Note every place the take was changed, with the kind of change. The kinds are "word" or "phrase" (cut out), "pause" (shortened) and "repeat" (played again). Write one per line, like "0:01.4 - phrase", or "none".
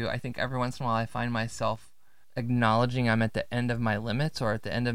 none

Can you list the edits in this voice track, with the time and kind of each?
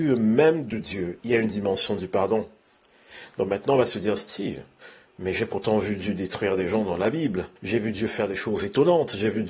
0:07.6 - pause

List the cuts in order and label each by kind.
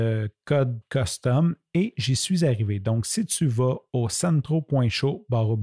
none

